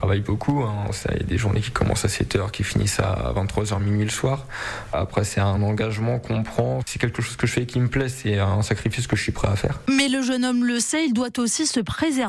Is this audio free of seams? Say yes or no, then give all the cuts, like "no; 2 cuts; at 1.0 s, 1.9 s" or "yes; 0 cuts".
yes; 0 cuts